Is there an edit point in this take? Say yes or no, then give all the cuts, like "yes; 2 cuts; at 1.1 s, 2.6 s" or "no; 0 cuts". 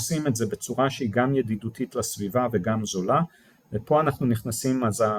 no; 0 cuts